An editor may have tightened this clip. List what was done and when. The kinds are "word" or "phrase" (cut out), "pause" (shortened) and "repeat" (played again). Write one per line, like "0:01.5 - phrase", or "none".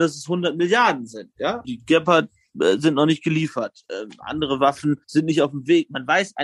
0:01.6 - word
0:05.0 - pause